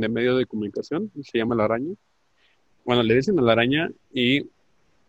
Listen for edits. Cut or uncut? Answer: uncut